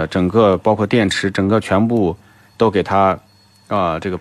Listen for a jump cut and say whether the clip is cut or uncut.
uncut